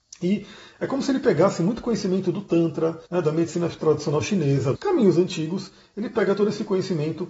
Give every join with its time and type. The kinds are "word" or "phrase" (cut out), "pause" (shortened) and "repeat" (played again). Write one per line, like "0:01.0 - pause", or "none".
0:03.1 - pause
0:04.7 - phrase